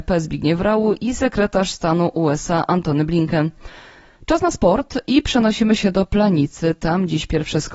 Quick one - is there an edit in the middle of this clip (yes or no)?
no